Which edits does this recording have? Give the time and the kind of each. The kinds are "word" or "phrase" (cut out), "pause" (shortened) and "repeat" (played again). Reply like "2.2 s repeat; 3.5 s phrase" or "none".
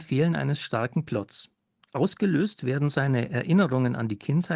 none